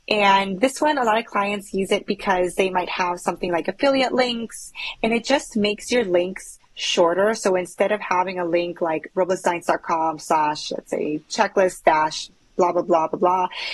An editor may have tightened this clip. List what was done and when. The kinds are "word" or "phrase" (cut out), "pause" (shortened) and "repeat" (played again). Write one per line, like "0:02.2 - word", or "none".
none